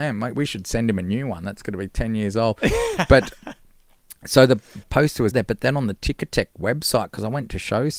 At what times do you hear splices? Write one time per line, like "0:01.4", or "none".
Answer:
0:04.8
0:05.3